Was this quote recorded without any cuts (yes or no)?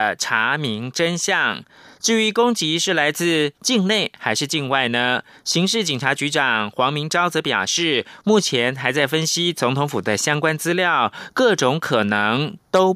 yes